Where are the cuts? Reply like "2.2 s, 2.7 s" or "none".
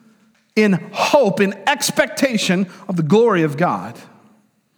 none